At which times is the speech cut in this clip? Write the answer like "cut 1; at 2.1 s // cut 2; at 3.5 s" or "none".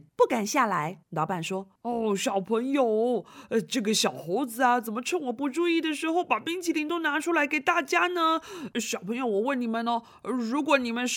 cut 1; at 1.0 s